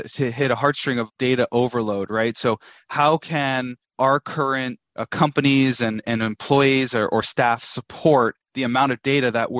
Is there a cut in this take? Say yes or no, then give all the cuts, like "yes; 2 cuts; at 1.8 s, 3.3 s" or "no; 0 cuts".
no; 0 cuts